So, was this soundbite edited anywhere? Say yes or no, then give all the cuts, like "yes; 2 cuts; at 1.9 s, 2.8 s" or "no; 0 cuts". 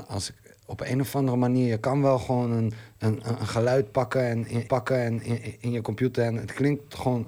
yes; 1 cut; at 4.7 s